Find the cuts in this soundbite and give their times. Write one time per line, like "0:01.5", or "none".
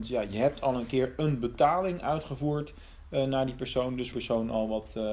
0:04.1